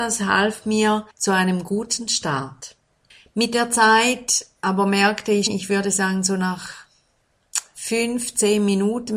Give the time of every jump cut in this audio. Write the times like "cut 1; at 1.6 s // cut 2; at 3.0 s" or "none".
cut 1; at 1.1 s // cut 2; at 3.1 s // cut 3; at 5.5 s